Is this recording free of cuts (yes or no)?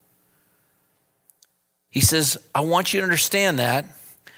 yes